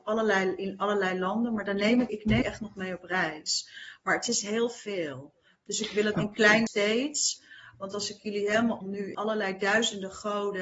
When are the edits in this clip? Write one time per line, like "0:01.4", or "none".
0:02.1
0:02.4
0:06.1
0:06.7
0:08.8
0:09.1